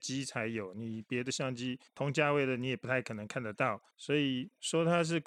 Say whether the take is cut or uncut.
cut